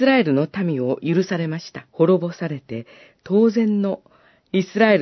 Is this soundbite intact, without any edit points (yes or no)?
no